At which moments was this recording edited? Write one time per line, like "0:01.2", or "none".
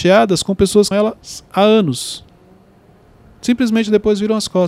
0:00.9